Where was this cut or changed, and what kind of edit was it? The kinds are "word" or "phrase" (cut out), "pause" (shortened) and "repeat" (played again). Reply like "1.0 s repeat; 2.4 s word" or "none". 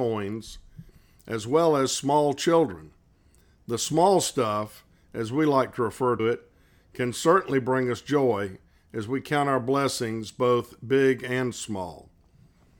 6.2 s word